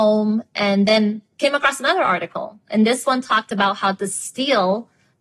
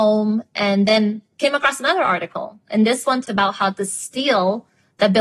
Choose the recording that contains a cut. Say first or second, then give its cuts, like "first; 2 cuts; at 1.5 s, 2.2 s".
second; 1 cut; at 3.2 s